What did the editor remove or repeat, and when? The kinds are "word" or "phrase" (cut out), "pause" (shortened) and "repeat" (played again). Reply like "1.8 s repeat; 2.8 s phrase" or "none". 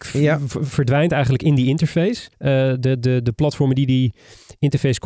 2.3 s pause